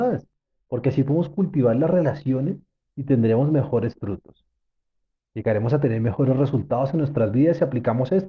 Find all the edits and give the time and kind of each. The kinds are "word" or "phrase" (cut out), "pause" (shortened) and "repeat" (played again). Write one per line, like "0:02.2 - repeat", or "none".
none